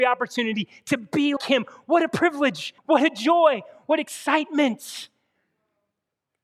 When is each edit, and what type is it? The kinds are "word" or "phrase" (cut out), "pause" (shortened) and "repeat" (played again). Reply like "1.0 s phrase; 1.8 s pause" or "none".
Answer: 1.4 s word; 2.8 s pause